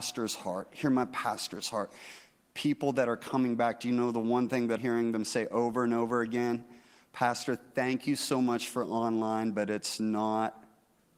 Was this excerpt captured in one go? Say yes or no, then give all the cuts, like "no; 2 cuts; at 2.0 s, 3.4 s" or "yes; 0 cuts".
no; 1 cut; at 4.8 s